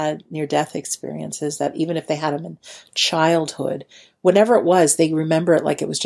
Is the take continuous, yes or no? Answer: yes